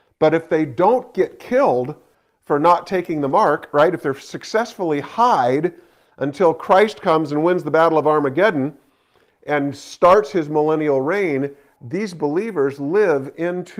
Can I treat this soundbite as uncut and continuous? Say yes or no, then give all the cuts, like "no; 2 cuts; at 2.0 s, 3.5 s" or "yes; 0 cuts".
yes; 0 cuts